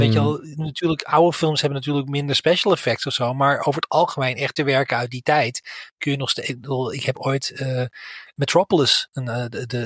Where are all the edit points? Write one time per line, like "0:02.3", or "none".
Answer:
0:04.6